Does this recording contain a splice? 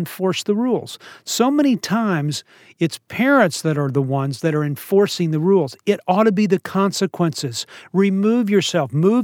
no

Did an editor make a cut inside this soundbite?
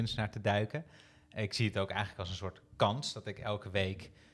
no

